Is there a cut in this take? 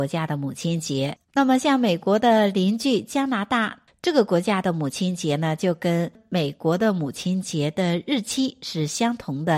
yes; 1 cut; at 1.2 s

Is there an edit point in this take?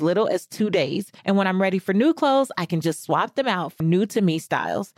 yes; 2 cuts; at 1.2 s, 3.8 s

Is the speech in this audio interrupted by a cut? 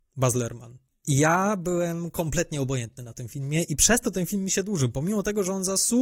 no; 0 cuts

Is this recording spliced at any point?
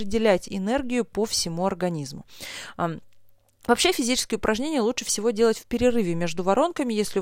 no; 0 cuts

